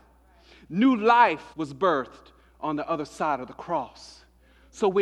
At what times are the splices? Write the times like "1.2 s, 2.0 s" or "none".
1.5 s

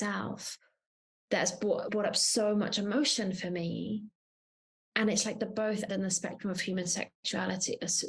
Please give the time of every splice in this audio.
1.9 s, 5.9 s

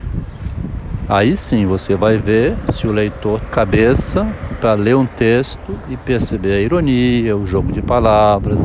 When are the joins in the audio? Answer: 3.5 s

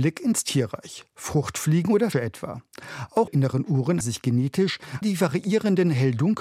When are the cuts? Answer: 2.1 s, 3.3 s, 4.0 s, 5.0 s

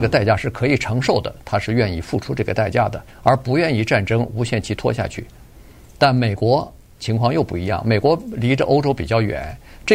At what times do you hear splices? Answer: none

